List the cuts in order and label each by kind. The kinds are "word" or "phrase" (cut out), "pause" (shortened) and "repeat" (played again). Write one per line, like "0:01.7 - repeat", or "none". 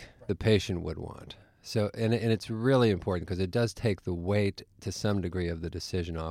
none